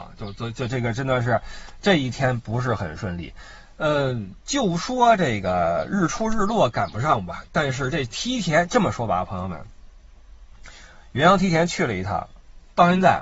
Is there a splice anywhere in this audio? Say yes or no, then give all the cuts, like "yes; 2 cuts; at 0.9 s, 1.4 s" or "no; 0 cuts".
no; 0 cuts